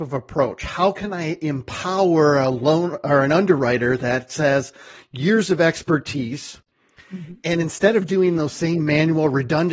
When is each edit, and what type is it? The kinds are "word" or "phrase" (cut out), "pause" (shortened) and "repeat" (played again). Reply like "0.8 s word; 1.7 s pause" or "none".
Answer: none